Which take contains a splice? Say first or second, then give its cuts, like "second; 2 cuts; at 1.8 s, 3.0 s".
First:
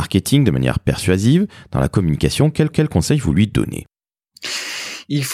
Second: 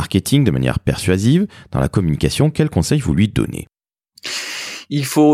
first; 1 cut; at 2.7 s